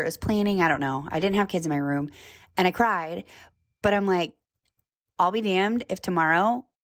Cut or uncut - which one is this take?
uncut